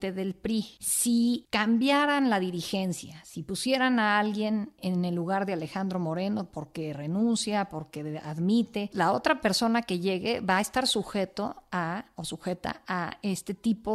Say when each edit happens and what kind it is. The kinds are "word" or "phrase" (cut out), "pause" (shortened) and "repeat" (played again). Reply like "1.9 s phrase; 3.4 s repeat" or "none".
8.9 s word